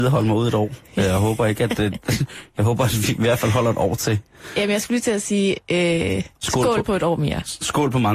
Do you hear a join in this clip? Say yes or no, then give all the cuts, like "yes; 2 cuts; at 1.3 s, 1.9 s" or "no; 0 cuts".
no; 0 cuts